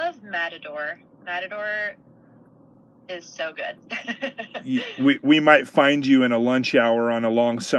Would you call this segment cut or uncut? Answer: uncut